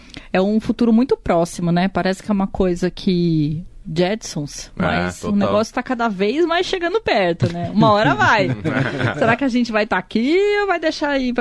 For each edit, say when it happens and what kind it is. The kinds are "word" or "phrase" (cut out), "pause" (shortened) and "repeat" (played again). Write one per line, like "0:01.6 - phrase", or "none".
none